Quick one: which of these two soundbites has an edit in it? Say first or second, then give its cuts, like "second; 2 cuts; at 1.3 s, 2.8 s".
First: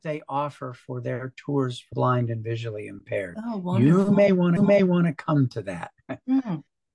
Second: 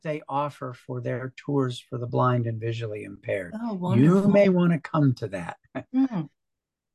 first; 2 cuts; at 1.9 s, 4.6 s